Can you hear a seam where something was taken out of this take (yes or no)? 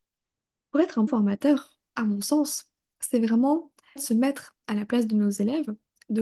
yes